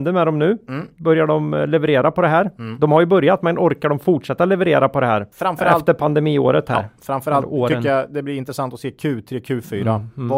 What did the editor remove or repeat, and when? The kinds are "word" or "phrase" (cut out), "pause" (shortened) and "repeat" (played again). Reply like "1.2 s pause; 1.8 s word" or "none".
5.3 s pause